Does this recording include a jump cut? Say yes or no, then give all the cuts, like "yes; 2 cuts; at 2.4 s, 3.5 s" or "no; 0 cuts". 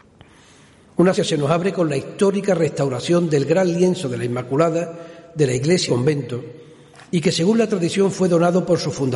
yes; 2 cuts; at 1.2 s, 5.9 s